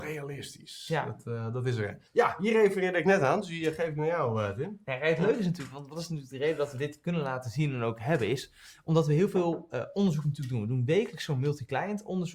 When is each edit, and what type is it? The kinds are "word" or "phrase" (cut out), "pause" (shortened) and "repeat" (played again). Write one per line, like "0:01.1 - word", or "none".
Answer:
0:02.1 - pause